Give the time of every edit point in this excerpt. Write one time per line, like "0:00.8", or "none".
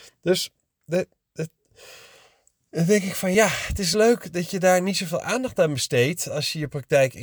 none

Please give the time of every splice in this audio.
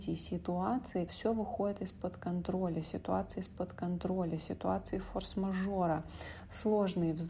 0:01.1
0:03.3

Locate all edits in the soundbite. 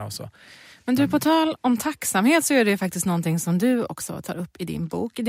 none

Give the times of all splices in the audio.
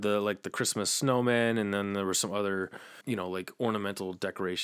0:03.0

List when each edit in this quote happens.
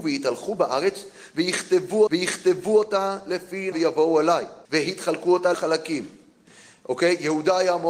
0:02.1
0:03.7
0:04.6
0:05.5

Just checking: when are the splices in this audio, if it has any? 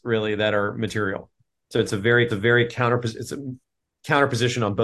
0:02.3

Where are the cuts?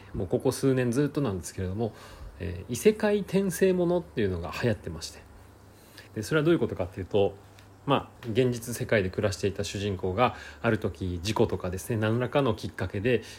0:06.1
0:08.2

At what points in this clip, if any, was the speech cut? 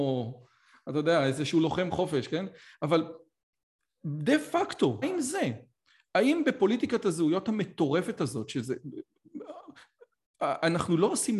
0:05.0

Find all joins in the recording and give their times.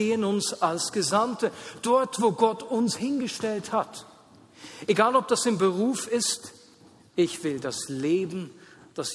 none

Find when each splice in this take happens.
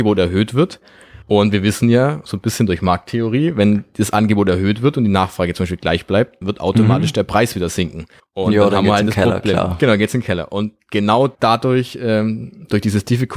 0:01.2
0:06.4
0:08.2
0:11.3

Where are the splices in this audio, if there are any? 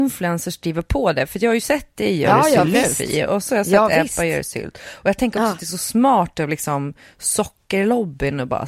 none

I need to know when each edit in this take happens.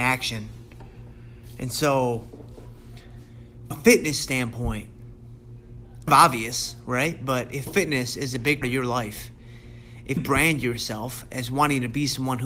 0:03.7
0:06.1
0:07.7
0:08.6
0:10.2

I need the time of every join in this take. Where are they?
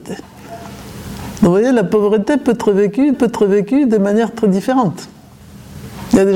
0:03.1

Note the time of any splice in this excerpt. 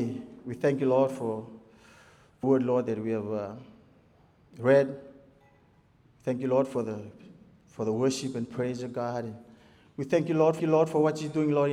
0:02.4
0:10.6

